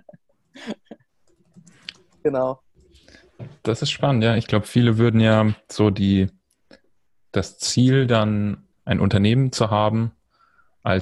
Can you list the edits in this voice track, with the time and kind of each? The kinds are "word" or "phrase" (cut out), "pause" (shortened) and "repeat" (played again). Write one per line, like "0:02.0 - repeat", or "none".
0:08.7 - word